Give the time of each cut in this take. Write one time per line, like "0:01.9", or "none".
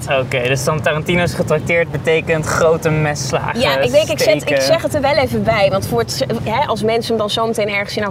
none